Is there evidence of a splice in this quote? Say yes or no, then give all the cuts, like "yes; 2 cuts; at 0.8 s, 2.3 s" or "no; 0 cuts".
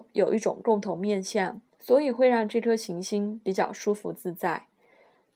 yes; 1 cut; at 1.7 s